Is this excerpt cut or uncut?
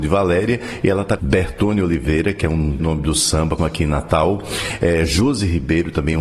cut